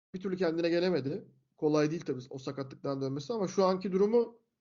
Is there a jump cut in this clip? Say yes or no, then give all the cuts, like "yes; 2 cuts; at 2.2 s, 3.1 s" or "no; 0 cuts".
no; 0 cuts